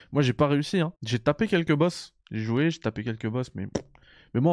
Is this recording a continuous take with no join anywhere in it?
no; 2 cuts; at 1.0 s, 2.2 s

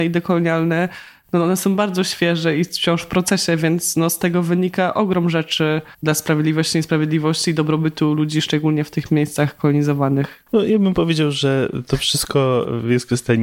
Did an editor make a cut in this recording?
yes; 2 cuts; at 5.9 s, 10.5 s

